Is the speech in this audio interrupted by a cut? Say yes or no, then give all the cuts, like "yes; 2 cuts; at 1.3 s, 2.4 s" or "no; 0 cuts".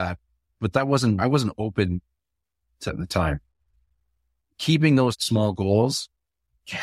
yes; 3 cuts; at 1.2 s, 2.9 s, 5.1 s